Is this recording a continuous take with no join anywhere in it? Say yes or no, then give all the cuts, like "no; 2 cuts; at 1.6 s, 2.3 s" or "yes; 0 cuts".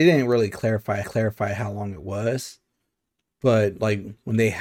no; 1 cut; at 1.0 s